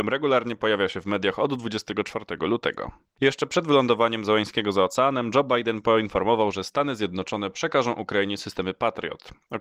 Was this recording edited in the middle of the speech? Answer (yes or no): no